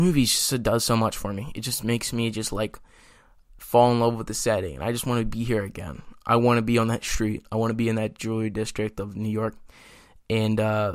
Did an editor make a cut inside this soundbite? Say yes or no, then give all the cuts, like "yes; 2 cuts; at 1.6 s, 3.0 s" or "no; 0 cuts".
no; 0 cuts